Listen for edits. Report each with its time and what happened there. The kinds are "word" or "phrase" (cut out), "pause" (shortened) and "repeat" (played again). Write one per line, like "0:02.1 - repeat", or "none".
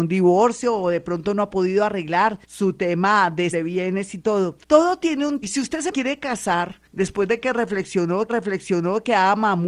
0:02.4 - pause
0:03.5 - word
0:04.6 - pause
0:05.4 - word
0:05.9 - word
0:06.8 - pause
0:08.3 - repeat